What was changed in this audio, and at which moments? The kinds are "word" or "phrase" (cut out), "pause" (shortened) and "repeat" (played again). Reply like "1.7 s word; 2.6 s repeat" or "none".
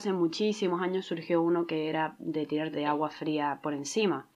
2.7 s phrase